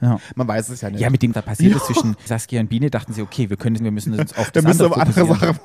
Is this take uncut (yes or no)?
no